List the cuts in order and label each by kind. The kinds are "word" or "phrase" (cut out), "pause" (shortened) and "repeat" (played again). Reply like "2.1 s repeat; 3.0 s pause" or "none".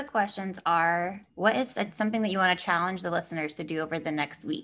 1.3 s pause